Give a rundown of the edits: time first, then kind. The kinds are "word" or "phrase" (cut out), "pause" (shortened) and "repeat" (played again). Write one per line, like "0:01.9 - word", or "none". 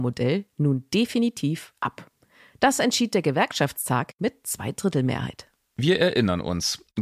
none